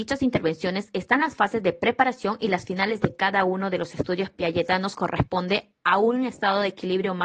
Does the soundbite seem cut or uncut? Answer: cut